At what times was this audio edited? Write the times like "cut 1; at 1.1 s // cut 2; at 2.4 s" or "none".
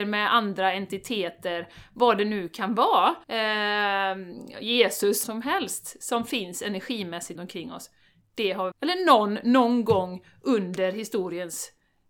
cut 1; at 3.2 s // cut 2; at 5.2 s // cut 3; at 7.4 s // cut 4; at 8.7 s